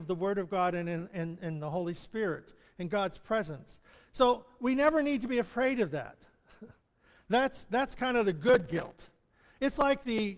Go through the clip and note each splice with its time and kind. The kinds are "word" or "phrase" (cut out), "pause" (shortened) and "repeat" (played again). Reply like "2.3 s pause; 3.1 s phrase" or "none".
none